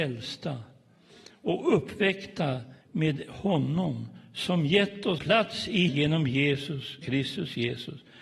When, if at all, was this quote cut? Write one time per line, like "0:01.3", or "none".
0:02.8
0:05.2
0:05.9
0:07.0